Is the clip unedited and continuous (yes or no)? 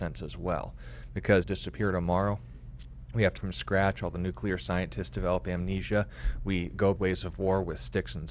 no